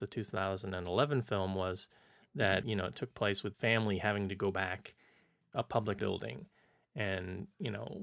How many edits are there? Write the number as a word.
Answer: four